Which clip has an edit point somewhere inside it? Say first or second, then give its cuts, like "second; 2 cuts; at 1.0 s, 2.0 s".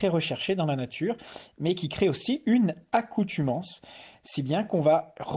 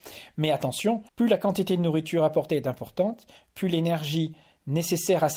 second; 1 cut; at 1.1 s